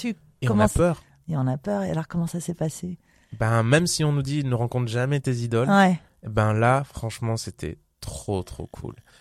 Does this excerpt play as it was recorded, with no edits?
yes; 0 cuts

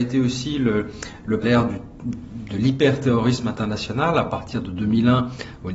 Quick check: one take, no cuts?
no; 1 cut; at 1.4 s

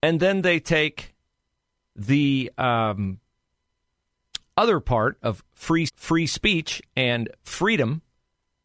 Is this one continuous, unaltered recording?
no; 1 cut; at 5.9 s

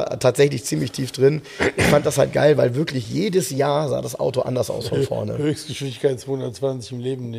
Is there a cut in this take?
no; 0 cuts

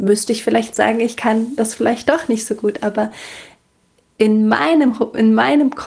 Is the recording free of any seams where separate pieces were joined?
yes; 0 cuts

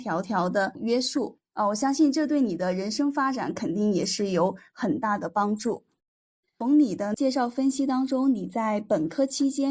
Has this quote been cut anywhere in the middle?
no; 0 cuts

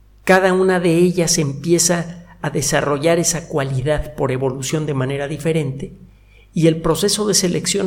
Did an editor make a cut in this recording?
no; 0 cuts

